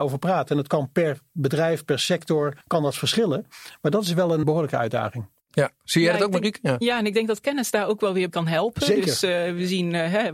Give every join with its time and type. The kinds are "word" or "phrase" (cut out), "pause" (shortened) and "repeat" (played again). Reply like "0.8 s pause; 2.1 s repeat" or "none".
2.6 s pause; 4.4 s word; 8.3 s word